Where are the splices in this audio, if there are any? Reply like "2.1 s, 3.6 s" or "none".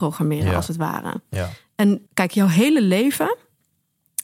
2.1 s